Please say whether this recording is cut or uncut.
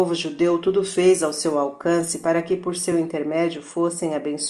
uncut